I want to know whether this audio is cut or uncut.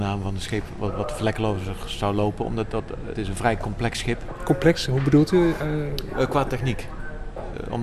cut